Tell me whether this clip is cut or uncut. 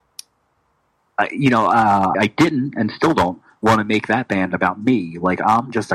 cut